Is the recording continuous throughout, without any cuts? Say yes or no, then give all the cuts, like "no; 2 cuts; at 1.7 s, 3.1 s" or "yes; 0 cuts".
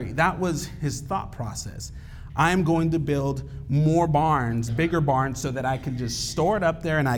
yes; 0 cuts